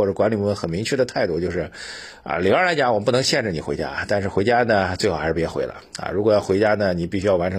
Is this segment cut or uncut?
uncut